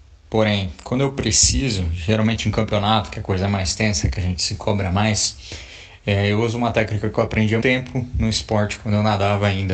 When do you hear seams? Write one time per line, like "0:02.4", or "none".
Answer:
0:07.6

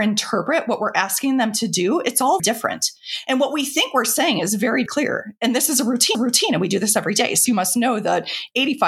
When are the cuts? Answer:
0:02.4
0:04.9
0:06.1
0:07.5

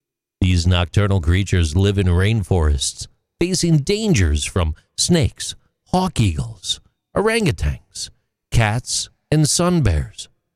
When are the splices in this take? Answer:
none

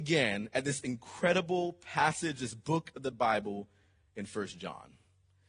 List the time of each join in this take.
none

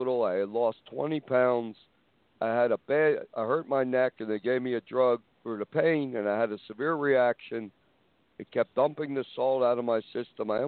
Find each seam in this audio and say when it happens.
none

